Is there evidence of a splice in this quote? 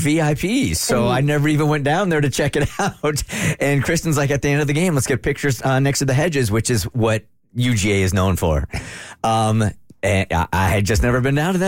no; 0 cuts

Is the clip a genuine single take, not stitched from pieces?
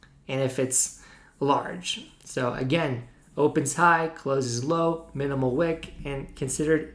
yes; 0 cuts

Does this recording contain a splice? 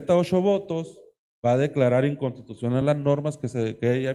no; 0 cuts

